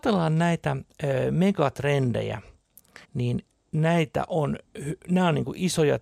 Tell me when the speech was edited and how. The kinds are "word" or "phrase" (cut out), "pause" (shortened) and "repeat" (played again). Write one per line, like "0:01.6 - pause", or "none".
0:03.0 - pause